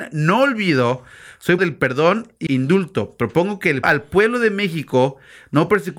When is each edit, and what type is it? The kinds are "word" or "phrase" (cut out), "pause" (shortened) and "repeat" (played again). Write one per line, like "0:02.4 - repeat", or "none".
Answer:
0:01.6 - word
0:02.5 - word
0:03.8 - word